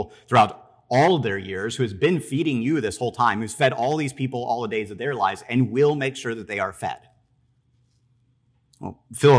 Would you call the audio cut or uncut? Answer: uncut